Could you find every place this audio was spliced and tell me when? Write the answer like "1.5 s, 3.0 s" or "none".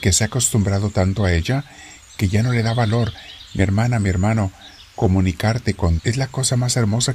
6.0 s